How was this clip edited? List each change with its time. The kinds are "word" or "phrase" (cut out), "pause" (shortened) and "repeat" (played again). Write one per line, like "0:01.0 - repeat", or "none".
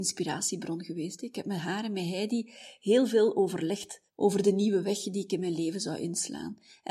0:04.1 - pause